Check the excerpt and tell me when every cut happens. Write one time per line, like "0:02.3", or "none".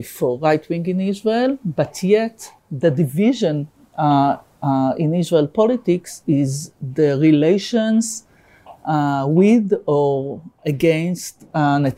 0:02.6